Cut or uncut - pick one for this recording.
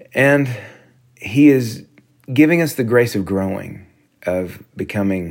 cut